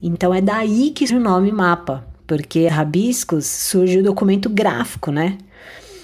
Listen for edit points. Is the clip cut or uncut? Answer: cut